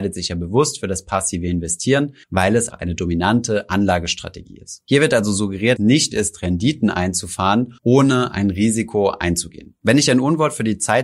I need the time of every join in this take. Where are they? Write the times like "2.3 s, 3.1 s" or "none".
2.2 s, 2.7 s, 5.8 s, 6.1 s, 7.8 s